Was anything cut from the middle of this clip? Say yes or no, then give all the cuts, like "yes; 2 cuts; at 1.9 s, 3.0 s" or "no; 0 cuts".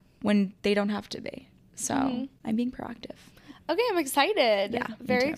no; 0 cuts